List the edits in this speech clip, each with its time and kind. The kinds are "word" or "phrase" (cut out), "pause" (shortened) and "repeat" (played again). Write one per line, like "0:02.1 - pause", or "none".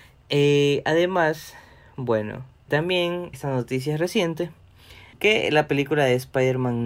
0:02.7 - word
0:03.3 - word
0:05.1 - pause